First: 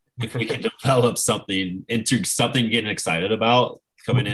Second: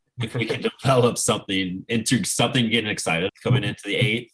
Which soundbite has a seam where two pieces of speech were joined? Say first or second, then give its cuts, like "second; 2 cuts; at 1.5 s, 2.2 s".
second; 1 cut; at 3.3 s